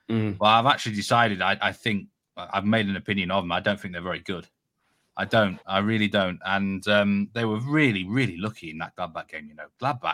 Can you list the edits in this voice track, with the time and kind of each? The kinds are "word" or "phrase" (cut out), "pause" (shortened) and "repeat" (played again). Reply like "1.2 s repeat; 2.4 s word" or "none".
none